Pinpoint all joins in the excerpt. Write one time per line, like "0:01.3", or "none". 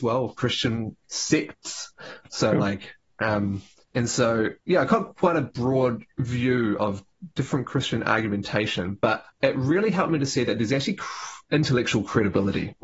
0:01.0
0:03.8
0:04.6
0:06.1
0:09.3